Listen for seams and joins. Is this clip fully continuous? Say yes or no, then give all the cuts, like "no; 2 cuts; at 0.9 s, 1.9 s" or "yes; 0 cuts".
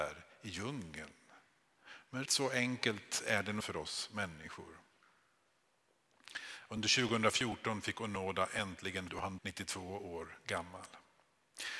no; 4 cuts; at 2.3 s, 3.6 s, 9.1 s, 9.4 s